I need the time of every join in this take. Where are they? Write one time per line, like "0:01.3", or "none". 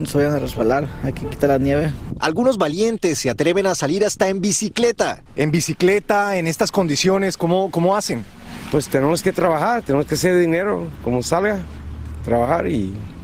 0:05.3